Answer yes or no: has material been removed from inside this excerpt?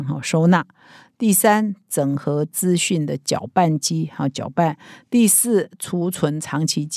no